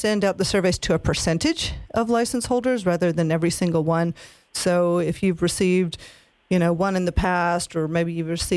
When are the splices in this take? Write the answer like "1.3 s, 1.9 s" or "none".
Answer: none